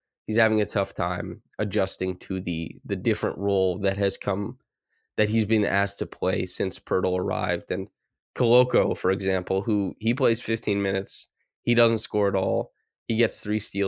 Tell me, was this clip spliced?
no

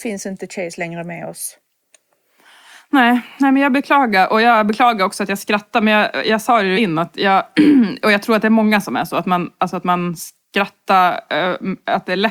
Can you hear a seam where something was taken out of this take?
yes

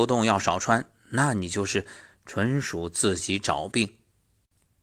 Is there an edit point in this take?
no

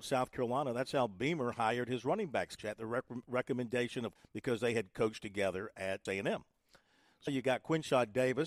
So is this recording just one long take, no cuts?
no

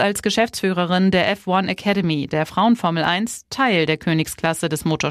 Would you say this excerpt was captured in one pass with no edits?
yes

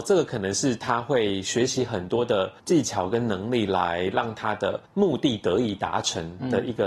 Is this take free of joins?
no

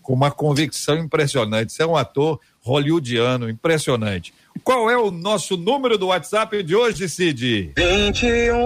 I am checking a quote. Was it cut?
no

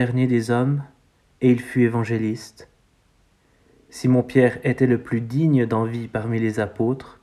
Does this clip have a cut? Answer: no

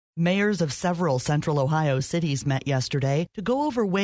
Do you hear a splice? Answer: no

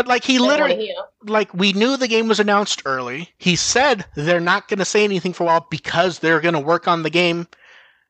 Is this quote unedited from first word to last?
no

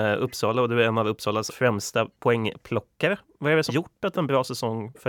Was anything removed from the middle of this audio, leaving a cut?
yes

